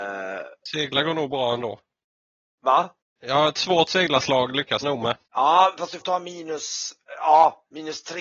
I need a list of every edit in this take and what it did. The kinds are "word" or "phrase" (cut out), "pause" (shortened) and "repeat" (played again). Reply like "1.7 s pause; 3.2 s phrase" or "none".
3.0 s pause; 4.8 s word; 5.3 s pause; 6.0 s word